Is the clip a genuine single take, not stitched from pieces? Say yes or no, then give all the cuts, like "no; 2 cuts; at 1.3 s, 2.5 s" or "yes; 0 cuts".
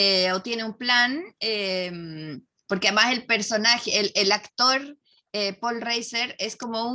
yes; 0 cuts